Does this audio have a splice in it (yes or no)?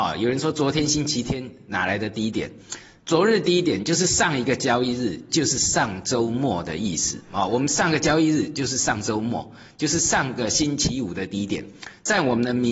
no